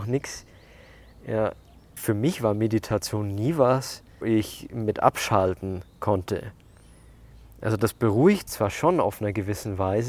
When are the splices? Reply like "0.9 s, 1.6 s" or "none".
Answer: 2.0 s, 4.2 s, 8.5 s